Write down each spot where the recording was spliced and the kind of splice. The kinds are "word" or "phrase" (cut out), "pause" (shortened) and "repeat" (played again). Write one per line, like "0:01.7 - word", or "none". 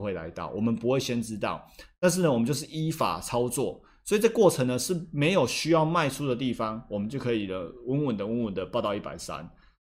none